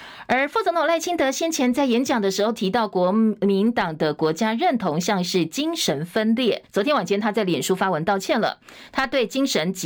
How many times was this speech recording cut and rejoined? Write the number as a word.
one